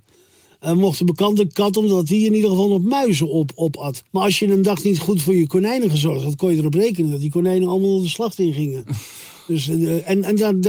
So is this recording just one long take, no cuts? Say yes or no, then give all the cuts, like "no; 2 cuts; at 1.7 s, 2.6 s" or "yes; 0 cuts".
no; 1 cut; at 4.1 s